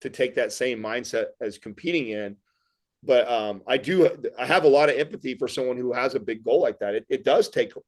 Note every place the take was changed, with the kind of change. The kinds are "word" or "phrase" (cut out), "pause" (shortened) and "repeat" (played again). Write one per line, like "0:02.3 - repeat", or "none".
none